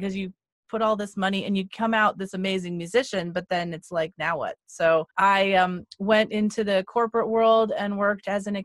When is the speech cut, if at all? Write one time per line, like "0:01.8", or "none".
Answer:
0:05.1